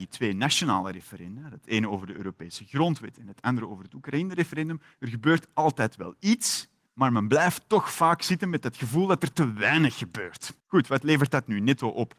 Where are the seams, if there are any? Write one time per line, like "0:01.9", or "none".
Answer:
0:06.9
0:10.6